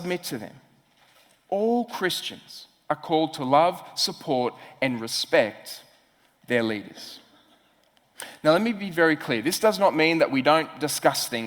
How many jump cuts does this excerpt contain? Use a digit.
0